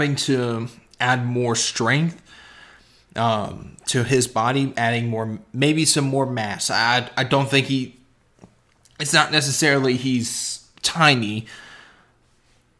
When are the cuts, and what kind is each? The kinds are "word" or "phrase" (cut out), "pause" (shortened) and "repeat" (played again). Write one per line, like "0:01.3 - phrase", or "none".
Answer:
none